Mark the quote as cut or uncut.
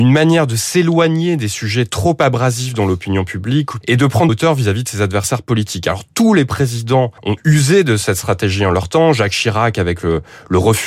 cut